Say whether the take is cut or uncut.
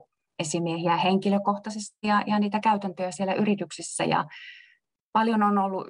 uncut